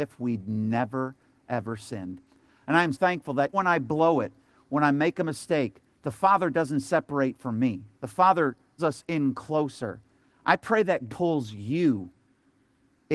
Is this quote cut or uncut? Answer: cut